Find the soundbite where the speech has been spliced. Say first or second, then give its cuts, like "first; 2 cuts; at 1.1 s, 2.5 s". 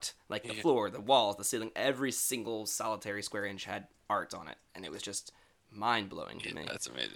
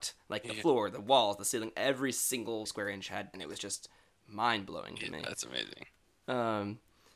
second; 2 cuts; at 2.7 s, 3.3 s